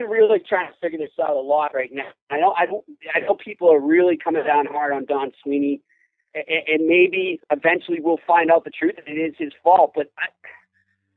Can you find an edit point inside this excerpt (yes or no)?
no